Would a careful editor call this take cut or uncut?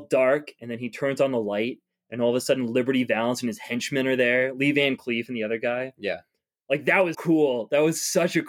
cut